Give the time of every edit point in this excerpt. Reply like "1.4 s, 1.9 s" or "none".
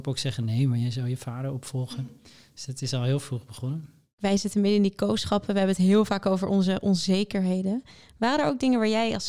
none